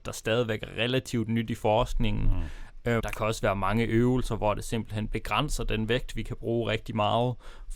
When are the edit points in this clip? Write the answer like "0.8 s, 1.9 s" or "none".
3.0 s